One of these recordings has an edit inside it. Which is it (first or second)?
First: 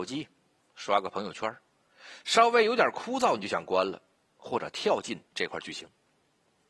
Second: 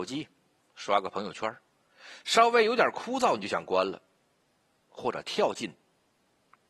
first